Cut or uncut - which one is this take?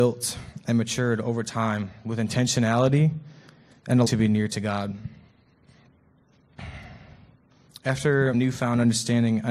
cut